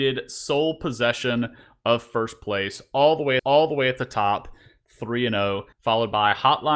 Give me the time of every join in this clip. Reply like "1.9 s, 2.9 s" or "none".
3.4 s, 5.7 s